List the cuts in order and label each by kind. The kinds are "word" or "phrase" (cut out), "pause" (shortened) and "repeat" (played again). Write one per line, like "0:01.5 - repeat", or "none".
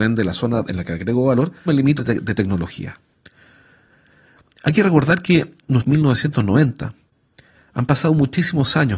0:01.7 - word
0:02.0 - phrase
0:05.8 - phrase